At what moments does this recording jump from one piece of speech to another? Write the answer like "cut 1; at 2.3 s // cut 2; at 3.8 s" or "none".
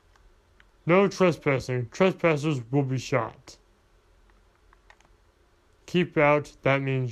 none